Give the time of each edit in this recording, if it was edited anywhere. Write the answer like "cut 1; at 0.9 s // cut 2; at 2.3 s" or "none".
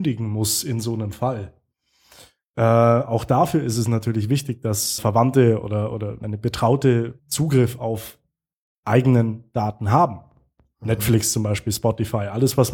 cut 1; at 5.0 s // cut 2; at 6.2 s // cut 3; at 7.2 s // cut 4; at 8.7 s

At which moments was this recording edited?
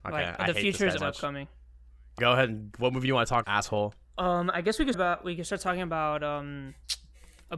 cut 1; at 1.0 s // cut 2; at 2.2 s // cut 3; at 3.4 s // cut 4; at 4.9 s

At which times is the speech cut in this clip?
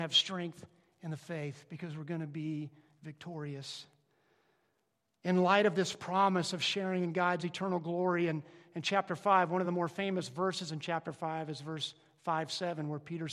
none

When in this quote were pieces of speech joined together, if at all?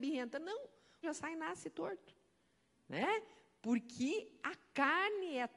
cut 1; at 1.0 s

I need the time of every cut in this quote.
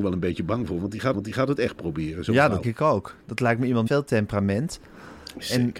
cut 1; at 1.1 s // cut 2; at 2.6 s // cut 3; at 3.9 s

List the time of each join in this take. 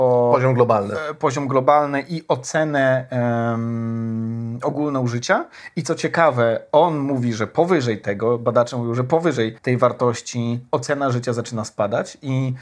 cut 1; at 9.6 s

